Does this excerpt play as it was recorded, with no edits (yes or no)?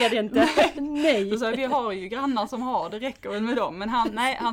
yes